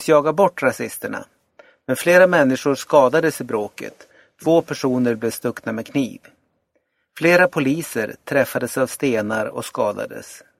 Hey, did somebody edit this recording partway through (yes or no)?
no